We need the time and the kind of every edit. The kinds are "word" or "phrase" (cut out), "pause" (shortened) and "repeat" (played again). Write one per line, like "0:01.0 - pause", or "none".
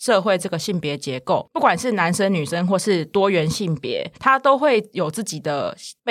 0:04.1 - pause